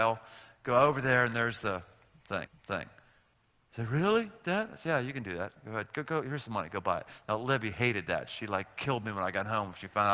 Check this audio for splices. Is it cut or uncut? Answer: cut